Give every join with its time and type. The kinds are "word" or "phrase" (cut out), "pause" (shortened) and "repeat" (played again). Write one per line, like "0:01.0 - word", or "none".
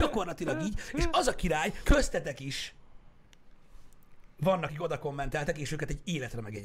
0:01.8 - word
0:04.7 - word

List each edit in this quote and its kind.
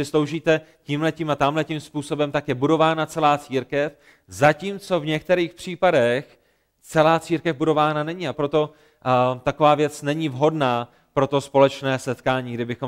0:08.3 - word

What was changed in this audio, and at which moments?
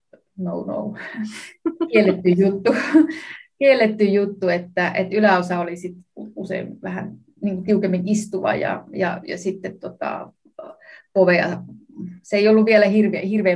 0:07.4 - phrase

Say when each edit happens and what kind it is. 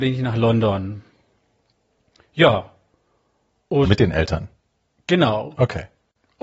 0:03.9 - word

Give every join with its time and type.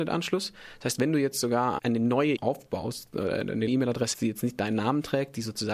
0:01.8 - word
0:02.4 - word
0:03.7 - word
0:04.1 - word

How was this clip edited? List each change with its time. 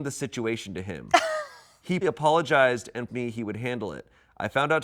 0:02.0 - word
0:03.1 - word

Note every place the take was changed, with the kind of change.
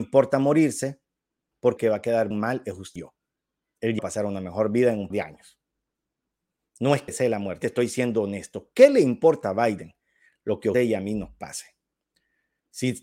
0:01.8 - word
0:02.3 - word
0:03.0 - word
0:04.0 - word
0:05.1 - word
0:07.1 - word
0:07.6 - word
0:10.7 - word

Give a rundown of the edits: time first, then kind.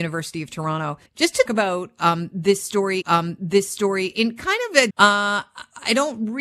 0:01.1 - pause
0:01.5 - word
0:03.0 - repeat
0:04.9 - phrase

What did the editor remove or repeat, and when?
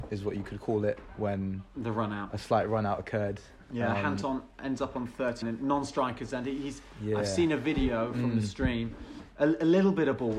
0:05.4 - word

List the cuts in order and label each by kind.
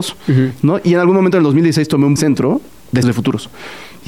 0:02.2 - phrase
0:03.0 - word

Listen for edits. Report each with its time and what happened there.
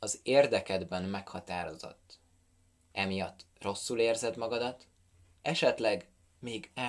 none

